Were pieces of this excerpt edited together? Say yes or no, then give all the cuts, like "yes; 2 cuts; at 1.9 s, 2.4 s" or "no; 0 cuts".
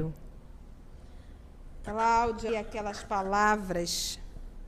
yes; 1 cut; at 2.5 s